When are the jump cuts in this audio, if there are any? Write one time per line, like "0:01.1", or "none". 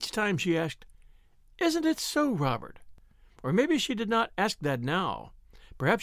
none